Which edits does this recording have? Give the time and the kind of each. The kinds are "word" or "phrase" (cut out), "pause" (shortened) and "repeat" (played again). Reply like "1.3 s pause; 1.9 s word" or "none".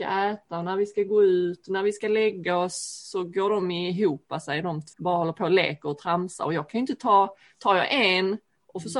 4.9 s word